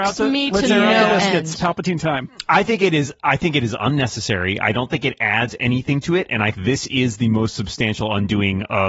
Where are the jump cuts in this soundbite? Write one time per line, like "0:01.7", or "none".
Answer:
0:06.5